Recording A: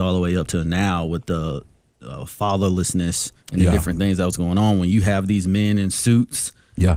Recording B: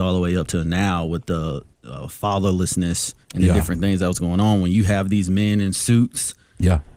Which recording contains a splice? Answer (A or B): B